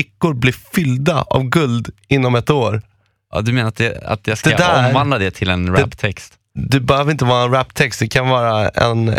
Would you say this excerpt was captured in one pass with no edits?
yes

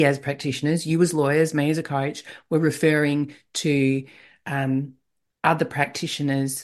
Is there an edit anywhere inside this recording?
no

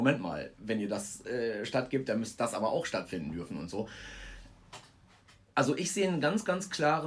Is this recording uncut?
yes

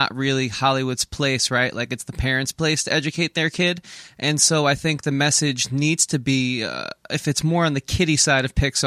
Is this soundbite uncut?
yes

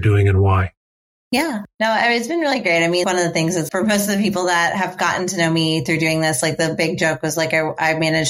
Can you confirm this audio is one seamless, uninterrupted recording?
no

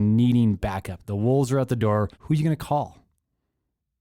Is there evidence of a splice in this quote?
yes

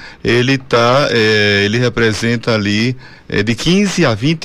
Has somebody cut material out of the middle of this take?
no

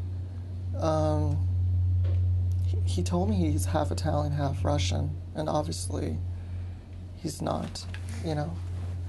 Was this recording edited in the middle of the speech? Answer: no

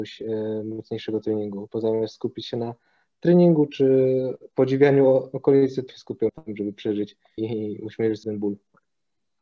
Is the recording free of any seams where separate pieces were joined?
no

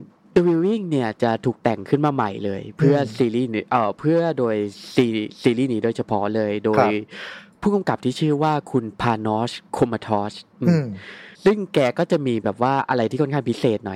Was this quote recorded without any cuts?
no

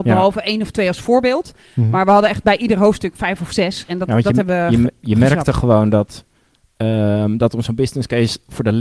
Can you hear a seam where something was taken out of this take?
no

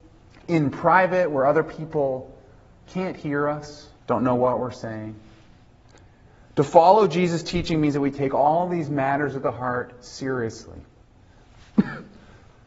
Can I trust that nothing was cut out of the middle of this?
no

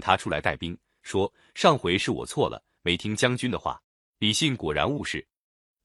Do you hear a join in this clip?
yes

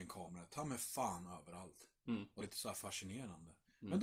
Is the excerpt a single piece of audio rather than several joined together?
no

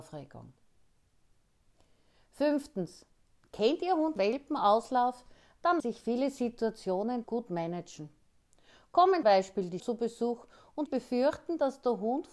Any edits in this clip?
yes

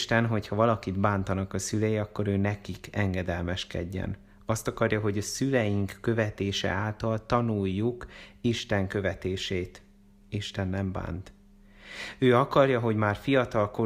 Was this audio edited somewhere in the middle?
no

